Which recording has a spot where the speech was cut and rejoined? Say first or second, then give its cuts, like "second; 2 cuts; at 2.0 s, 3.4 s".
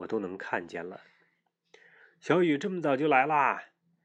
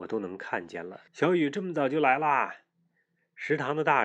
second; 1 cut; at 1.1 s